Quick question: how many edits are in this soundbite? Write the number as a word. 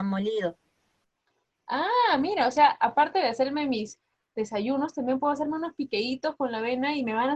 zero